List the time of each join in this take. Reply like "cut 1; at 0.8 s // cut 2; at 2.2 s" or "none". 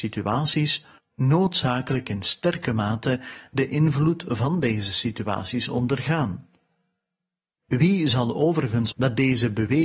cut 1; at 1.0 s // cut 2; at 8.9 s